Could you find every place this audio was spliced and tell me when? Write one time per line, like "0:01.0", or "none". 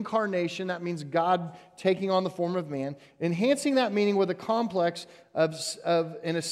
none